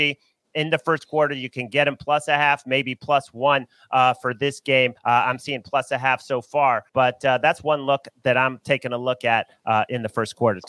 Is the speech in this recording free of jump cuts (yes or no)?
no